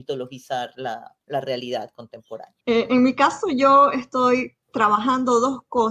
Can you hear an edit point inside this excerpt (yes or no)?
yes